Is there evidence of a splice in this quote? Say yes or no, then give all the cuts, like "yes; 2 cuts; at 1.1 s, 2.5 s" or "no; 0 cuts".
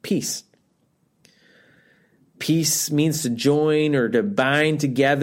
no; 0 cuts